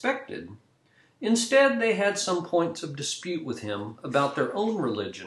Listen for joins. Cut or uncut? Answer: uncut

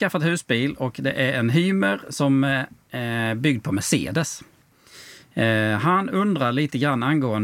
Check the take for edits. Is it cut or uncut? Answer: uncut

